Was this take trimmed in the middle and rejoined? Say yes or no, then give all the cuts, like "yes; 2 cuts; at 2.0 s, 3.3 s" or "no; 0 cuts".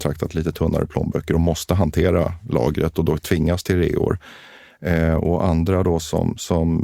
no; 0 cuts